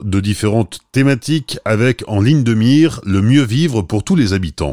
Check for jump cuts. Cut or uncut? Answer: uncut